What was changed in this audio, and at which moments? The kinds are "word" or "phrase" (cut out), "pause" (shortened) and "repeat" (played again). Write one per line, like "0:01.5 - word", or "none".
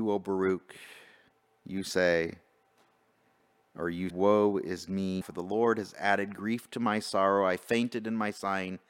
0:04.1 - word
0:05.2 - word